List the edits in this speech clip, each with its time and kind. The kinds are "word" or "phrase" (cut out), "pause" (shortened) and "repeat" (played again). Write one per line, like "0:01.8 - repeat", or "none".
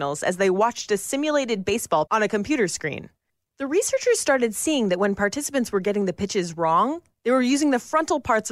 0:02.1 - word